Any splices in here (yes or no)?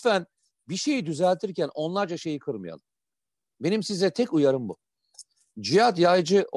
no